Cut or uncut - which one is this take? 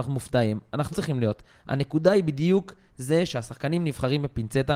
cut